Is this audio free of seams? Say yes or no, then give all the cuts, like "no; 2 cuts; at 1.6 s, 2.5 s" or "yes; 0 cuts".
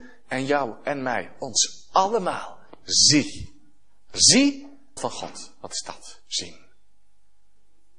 no; 1 cut; at 5.0 s